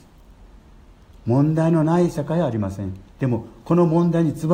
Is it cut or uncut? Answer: cut